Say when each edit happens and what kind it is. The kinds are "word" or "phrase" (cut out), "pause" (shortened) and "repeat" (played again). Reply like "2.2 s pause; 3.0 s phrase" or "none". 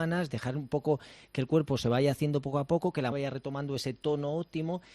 3.1 s word